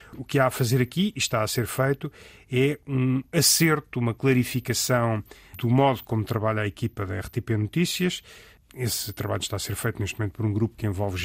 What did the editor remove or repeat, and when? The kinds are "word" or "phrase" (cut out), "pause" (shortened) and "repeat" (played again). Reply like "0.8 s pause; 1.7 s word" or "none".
none